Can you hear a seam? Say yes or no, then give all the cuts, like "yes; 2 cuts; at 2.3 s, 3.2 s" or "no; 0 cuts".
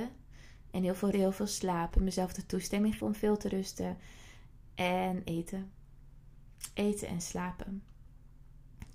yes; 2 cuts; at 1.1 s, 3.0 s